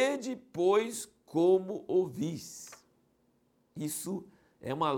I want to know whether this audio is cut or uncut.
uncut